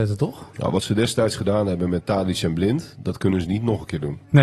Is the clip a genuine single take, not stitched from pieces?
yes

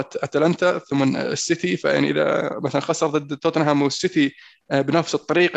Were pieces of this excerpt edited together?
no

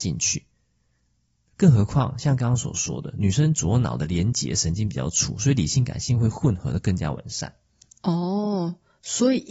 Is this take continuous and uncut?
yes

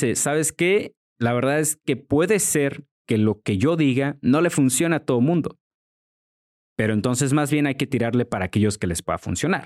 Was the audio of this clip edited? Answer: no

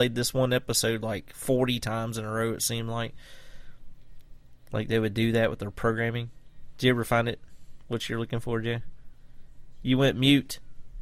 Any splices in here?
no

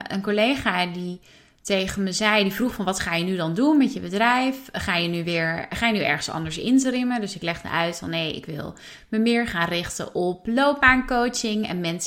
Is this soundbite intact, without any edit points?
yes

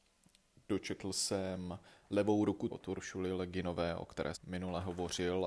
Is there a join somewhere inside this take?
yes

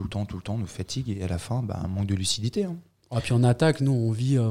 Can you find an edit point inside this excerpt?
no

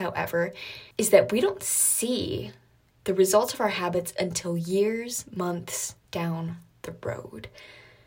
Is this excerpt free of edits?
no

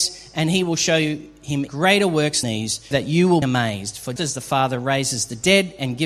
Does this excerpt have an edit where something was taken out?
yes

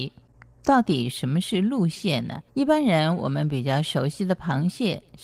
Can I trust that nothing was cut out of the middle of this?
no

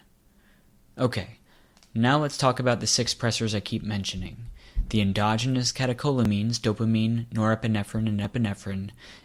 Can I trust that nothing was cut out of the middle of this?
yes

